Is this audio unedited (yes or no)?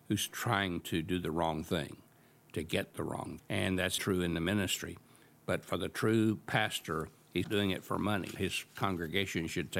no